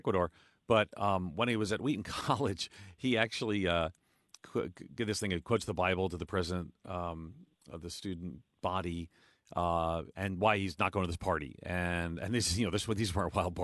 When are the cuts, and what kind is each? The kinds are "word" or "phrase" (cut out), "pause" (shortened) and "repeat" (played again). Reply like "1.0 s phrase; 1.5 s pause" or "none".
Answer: none